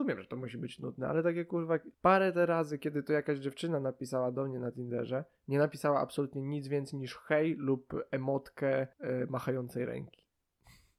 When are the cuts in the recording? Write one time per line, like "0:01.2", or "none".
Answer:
0:01.9
0:08.9